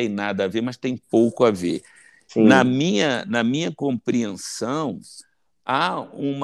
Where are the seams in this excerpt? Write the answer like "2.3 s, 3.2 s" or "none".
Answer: none

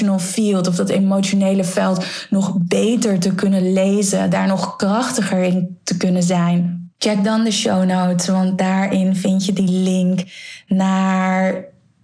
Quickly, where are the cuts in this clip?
6.9 s

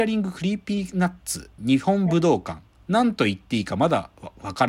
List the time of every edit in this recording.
1.6 s

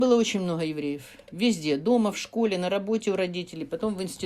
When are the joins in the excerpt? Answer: none

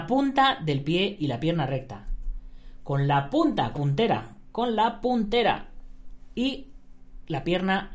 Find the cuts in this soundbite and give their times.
3.8 s

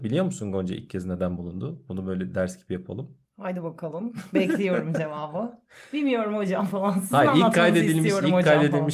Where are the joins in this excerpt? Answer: 3.2 s

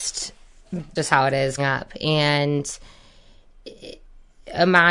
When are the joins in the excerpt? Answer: 1.0 s, 1.6 s

